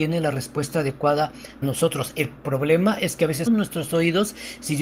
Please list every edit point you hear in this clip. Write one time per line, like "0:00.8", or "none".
0:01.6
0:03.5

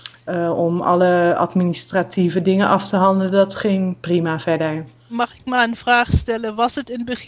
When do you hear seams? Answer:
none

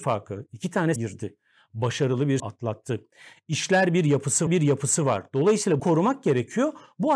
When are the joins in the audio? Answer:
0:01.0
0:02.4
0:04.5
0:05.8

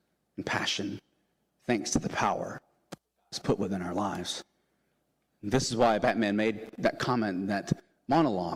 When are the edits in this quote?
none

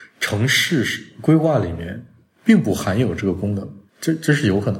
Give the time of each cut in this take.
none

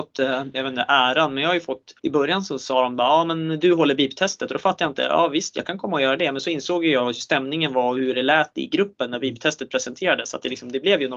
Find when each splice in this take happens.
0:02.0

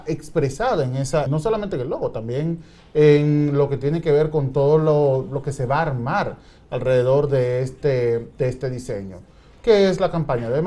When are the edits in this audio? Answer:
0:01.3

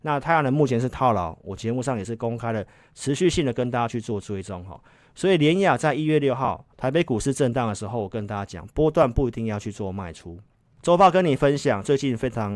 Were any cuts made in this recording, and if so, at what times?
0:06.7

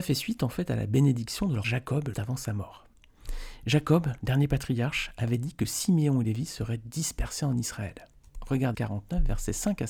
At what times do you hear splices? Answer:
0:01.6
0:02.1
0:08.7

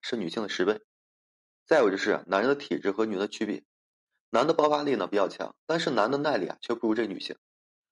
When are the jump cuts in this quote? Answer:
none

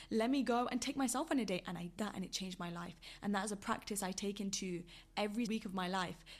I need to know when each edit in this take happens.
0:02.0
0:05.5

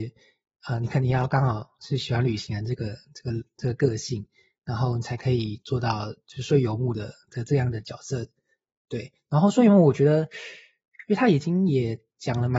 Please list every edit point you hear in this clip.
none

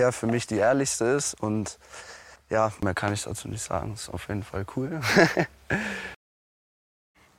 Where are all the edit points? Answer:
0:02.4

